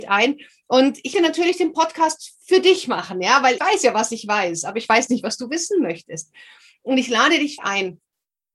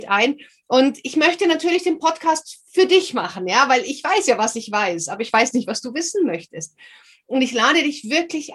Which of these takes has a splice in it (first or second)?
first